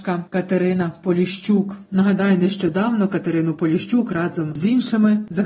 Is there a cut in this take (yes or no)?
no